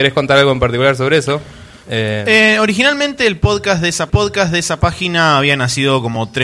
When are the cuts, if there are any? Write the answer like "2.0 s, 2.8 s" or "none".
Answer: 4.1 s